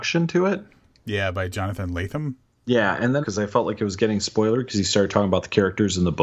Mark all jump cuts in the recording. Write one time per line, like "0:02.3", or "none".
0:03.2